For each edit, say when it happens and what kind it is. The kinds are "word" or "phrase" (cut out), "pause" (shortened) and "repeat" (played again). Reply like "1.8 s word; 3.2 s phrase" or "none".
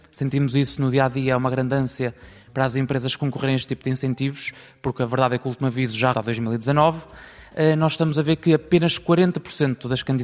6.1 s word